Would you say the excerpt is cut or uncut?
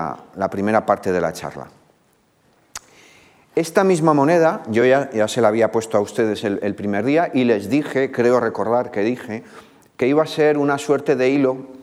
uncut